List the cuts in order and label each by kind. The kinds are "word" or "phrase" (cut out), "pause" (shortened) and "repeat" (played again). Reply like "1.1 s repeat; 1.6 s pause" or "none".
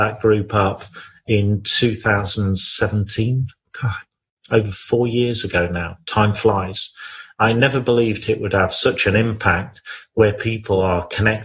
none